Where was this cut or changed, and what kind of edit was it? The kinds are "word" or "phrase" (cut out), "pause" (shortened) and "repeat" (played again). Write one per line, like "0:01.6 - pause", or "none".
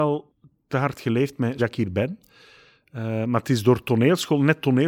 0:01.6 - word